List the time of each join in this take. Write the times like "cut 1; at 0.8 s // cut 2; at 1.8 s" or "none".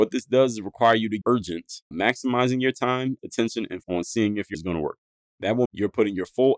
cut 1; at 1.2 s // cut 2; at 1.9 s // cut 3; at 3.2 s // cut 4; at 3.8 s // cut 5; at 4.5 s // cut 6; at 5.7 s

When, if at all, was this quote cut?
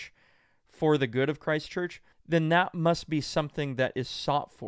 cut 1; at 2.1 s

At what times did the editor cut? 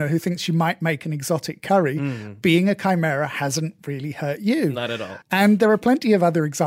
cut 1; at 5.2 s

